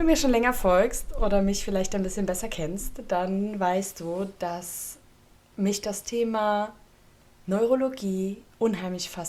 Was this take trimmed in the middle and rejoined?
no; 0 cuts

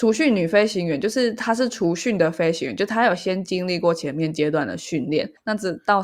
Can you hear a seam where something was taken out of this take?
no; 0 cuts

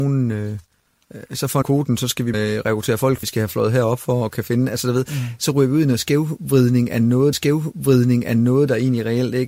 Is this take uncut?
no; 4 cuts; at 1.6 s, 2.3 s, 3.2 s, 7.3 s

